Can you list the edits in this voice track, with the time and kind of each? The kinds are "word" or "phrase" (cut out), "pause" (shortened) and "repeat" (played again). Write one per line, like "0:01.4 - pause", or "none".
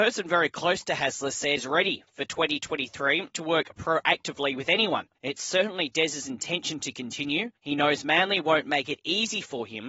0:01.6 - word
0:03.3 - phrase
0:05.2 - pause
0:07.6 - pause